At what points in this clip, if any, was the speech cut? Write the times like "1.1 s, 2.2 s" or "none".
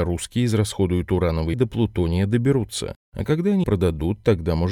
1.5 s, 3.6 s